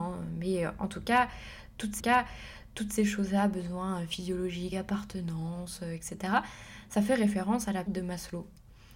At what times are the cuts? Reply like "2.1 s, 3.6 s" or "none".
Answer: 2.0 s, 4.7 s, 7.9 s